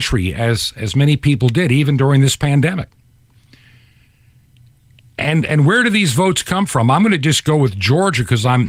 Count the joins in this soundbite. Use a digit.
0